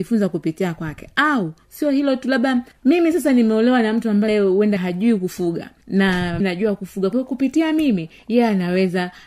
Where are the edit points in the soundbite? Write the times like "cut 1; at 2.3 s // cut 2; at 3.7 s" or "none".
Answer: cut 1; at 4.3 s // cut 2; at 4.8 s // cut 3; at 6.4 s